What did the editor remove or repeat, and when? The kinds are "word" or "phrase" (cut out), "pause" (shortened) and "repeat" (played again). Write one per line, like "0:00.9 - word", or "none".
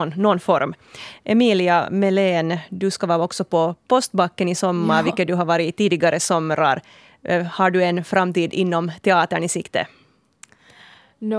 none